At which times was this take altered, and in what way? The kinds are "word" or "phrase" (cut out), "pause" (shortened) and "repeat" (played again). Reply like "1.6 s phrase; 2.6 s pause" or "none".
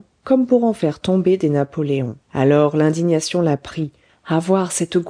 2.2 s pause